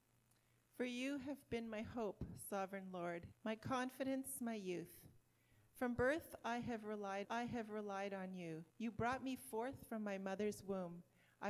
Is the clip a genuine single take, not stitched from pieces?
no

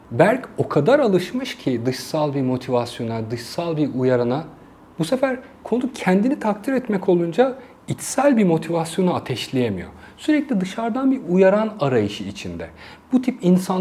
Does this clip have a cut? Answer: no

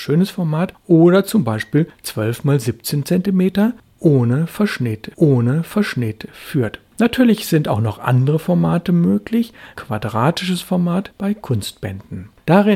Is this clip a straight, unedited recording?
no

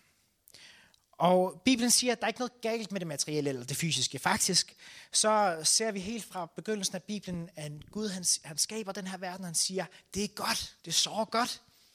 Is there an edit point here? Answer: yes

